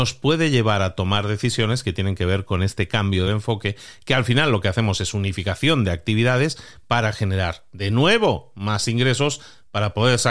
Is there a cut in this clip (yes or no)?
no